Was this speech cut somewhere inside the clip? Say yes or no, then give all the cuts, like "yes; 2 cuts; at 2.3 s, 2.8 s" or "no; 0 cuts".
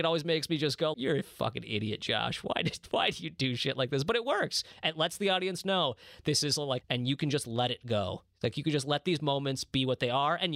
yes; 2 cuts; at 0.9 s, 6.8 s